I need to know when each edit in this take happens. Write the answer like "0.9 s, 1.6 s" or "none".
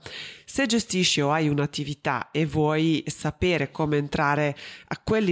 none